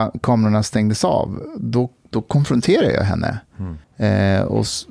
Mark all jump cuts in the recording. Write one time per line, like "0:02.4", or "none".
0:03.8